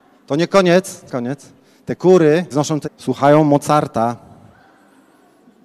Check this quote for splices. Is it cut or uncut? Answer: cut